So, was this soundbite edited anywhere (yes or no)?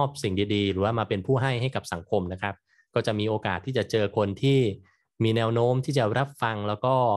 no